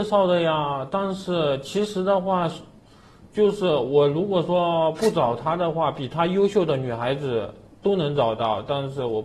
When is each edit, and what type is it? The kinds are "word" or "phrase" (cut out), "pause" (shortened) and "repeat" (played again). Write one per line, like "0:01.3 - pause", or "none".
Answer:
0:07.7 - pause